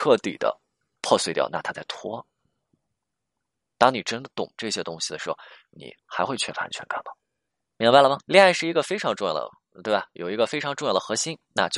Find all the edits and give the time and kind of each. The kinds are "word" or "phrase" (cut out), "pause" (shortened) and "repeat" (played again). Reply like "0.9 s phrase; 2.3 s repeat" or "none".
6.0 s pause; 7.5 s pause; 8.2 s pause